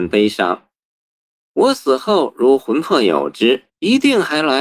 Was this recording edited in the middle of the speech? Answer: yes; 1 cut; at 3.7 s

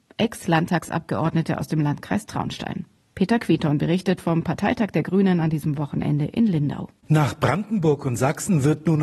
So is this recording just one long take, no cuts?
yes; 0 cuts

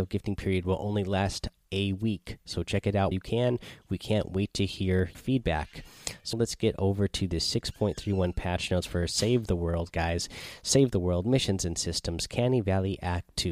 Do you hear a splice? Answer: yes; 3 cuts; at 3.1 s, 5.1 s, 6.3 s

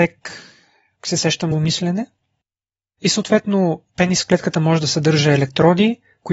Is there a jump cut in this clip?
yes; 2 cuts; at 1.5 s, 3.9 s

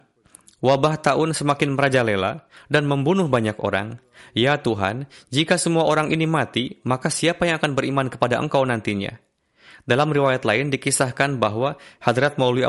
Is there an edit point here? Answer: no; 0 cuts

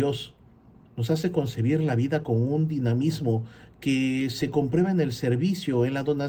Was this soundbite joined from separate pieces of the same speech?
no; 0 cuts

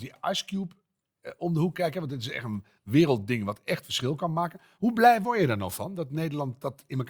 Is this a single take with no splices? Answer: yes; 0 cuts

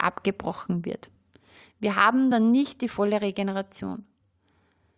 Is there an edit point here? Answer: no; 0 cuts

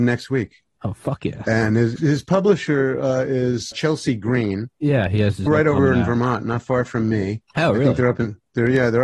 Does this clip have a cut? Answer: yes; 3 cuts; at 2.0 s, 3.7 s, 5.5 s

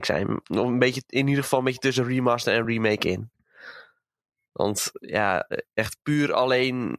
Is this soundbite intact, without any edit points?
yes; 0 cuts

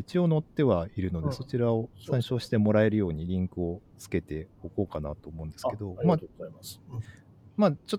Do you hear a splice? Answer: yes; 1 cut; at 1.9 s

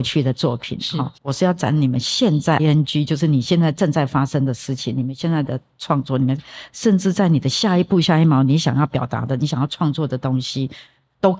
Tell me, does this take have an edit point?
yes; 2 cuts; at 1.2 s, 2.6 s

